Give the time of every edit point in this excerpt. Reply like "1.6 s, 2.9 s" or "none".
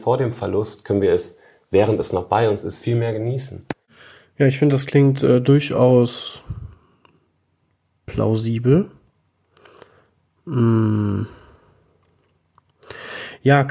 none